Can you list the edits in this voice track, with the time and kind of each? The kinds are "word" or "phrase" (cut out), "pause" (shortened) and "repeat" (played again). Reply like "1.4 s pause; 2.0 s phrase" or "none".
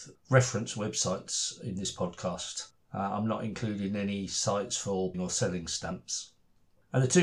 5.1 s word